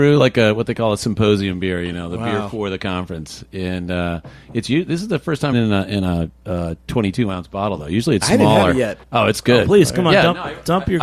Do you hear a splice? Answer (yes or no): yes